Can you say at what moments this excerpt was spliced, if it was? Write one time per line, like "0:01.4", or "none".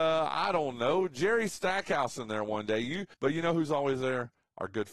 0:03.1